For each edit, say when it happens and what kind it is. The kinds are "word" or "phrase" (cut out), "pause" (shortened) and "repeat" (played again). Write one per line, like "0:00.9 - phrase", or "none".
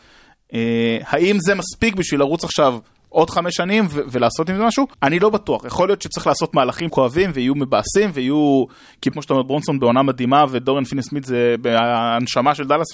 0:04.9 - pause
0:06.9 - phrase
0:09.1 - word